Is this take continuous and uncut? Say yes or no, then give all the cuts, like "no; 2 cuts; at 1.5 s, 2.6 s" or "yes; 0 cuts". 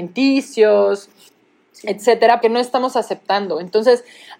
no; 1 cut; at 2.4 s